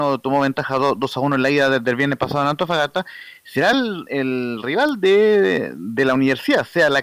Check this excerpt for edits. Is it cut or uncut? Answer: uncut